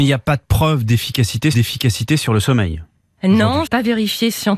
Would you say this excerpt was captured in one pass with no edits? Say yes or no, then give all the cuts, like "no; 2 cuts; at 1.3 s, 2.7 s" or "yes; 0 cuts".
no; 2 cuts; at 1.5 s, 3.7 s